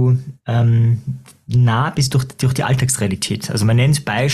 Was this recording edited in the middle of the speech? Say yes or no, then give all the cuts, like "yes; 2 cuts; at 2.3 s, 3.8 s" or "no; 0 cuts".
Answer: no; 0 cuts